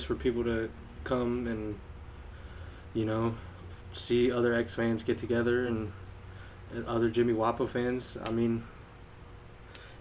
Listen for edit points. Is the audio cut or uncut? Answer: uncut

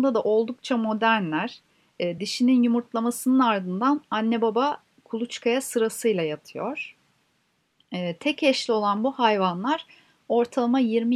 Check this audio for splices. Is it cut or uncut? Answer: uncut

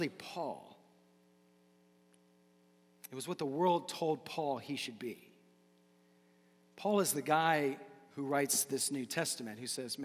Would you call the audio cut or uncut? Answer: uncut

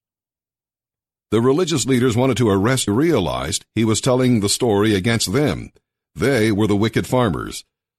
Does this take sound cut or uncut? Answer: cut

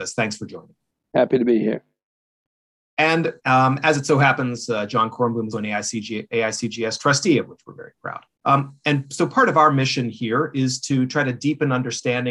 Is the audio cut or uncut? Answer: cut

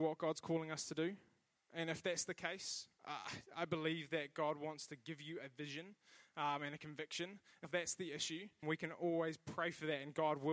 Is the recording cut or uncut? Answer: cut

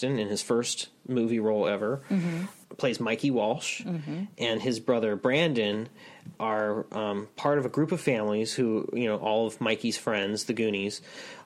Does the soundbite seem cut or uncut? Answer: cut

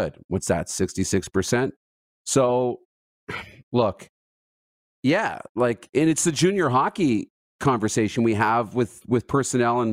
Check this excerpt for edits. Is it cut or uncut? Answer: uncut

